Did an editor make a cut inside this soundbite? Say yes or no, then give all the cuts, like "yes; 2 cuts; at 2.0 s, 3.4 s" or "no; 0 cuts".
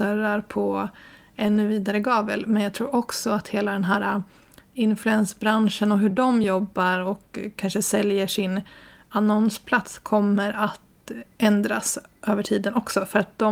no; 0 cuts